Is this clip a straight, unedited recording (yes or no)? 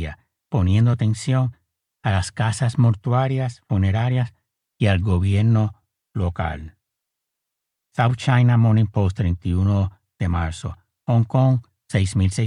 yes